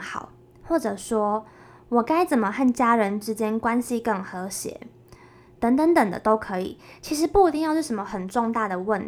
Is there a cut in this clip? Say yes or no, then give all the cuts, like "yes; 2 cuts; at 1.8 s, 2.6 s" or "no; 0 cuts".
no; 0 cuts